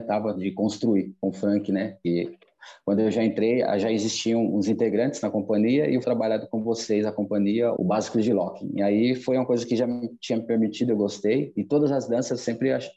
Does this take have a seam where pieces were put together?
yes; 2 cuts; at 6.0 s, 7.8 s

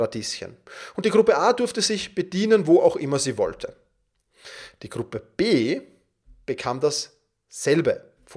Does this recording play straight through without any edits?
yes; 0 cuts

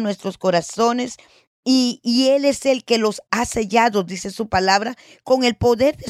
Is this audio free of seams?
yes; 0 cuts

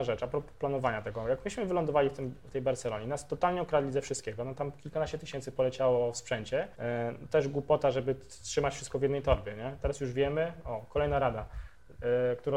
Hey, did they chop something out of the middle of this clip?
yes; 1 cut; at 6.7 s

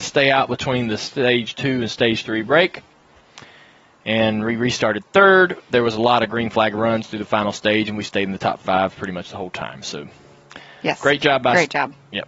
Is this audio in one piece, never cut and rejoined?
yes; 0 cuts

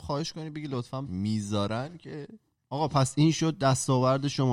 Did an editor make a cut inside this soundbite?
yes; 2 cuts; at 1.0 s, 2.6 s

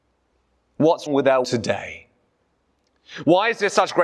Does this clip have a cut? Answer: yes; 2 cuts; at 1.1 s, 1.4 s

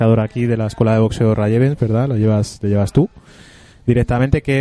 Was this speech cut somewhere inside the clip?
no; 0 cuts

